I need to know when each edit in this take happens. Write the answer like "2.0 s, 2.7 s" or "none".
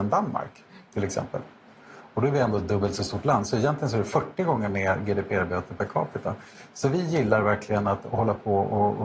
none

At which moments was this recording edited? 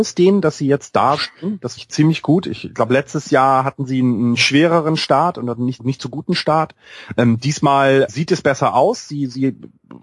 1.2 s, 1.8 s, 5.8 s, 8.1 s

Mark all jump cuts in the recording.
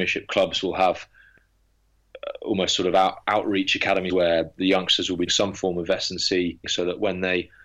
4.1 s, 5.3 s, 6.6 s

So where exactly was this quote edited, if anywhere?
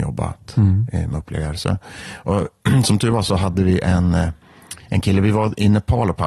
4.8 s

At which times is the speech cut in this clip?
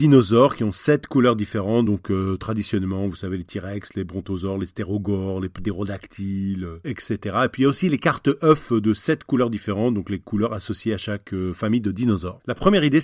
none

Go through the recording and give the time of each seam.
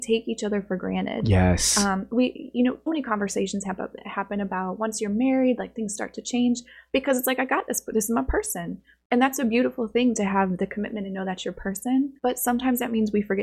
2.9 s, 12.2 s

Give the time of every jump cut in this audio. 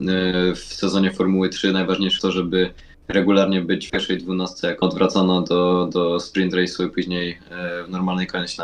2.2 s, 3.9 s, 4.8 s

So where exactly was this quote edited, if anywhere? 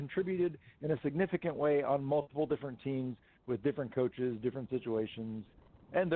none

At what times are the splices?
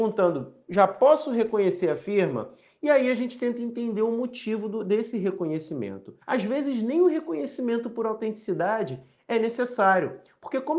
6.2 s

